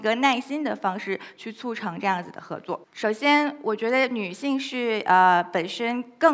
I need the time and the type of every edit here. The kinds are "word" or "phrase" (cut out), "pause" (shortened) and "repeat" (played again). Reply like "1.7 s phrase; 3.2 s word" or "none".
2.8 s pause